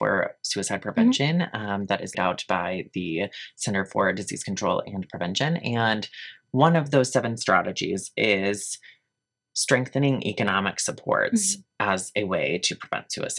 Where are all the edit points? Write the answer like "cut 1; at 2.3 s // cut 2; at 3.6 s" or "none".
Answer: cut 1; at 2.1 s